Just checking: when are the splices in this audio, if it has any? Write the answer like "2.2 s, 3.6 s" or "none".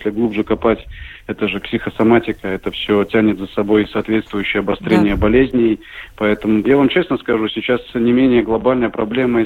1.6 s, 6.6 s